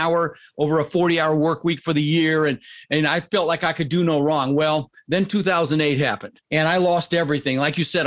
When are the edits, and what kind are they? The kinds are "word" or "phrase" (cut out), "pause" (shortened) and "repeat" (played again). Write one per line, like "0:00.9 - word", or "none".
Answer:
0:06.4 - pause